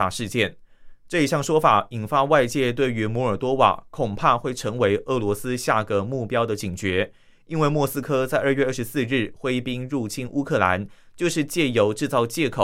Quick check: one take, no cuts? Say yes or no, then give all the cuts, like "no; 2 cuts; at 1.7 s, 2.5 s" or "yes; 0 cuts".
yes; 0 cuts